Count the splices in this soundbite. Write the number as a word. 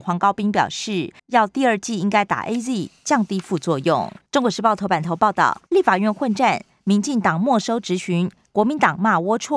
three